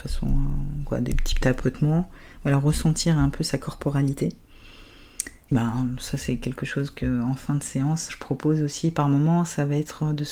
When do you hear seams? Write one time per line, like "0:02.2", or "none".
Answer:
0:05.5
0:08.1